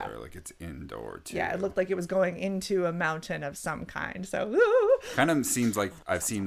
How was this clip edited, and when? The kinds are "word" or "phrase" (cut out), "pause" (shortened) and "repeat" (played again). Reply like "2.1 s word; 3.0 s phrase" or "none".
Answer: none